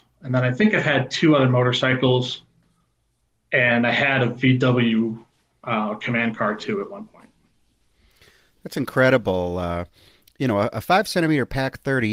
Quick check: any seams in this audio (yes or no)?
no